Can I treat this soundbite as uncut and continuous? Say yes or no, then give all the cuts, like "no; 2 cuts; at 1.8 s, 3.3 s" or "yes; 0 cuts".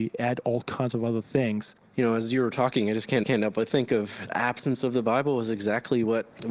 no; 2 cuts; at 3.2 s, 4.3 s